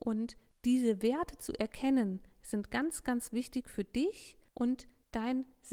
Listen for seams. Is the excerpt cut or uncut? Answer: uncut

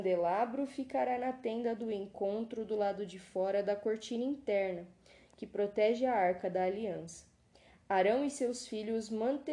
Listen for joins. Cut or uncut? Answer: uncut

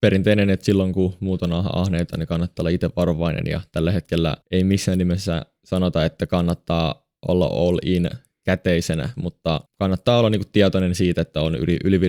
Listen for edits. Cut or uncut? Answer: cut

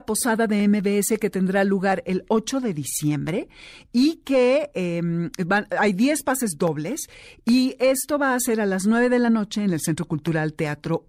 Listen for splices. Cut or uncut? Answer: uncut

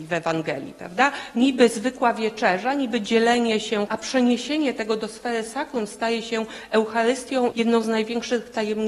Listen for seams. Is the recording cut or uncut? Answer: cut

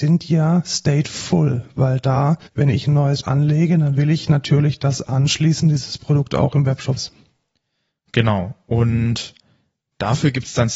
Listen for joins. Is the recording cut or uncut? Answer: cut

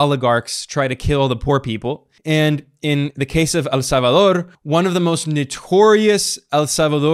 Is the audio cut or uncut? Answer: cut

